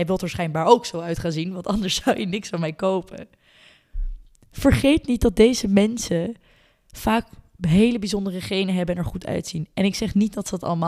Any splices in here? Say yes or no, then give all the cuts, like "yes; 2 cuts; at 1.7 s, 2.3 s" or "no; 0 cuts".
no; 0 cuts